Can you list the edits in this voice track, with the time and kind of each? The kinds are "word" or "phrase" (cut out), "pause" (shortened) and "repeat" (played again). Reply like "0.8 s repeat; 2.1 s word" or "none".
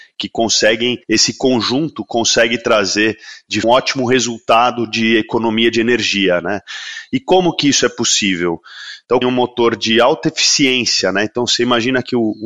1.0 s pause; 3.6 s phrase; 9.2 s phrase